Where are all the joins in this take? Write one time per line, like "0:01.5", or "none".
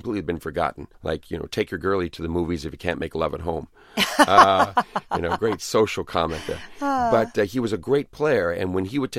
0:00.9